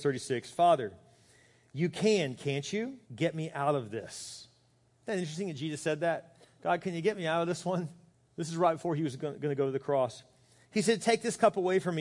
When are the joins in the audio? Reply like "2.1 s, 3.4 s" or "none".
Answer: 3.0 s, 8.1 s